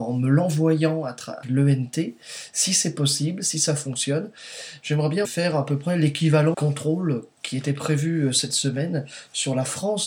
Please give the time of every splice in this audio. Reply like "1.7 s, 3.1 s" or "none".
1.4 s, 5.2 s, 6.5 s